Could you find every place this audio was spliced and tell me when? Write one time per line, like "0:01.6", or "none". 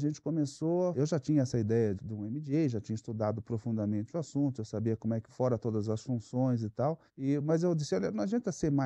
0:00.9
0:01.9
0:05.3
0:07.1